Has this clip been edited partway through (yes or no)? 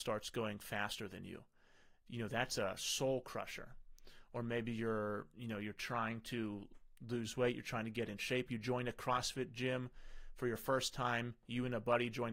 no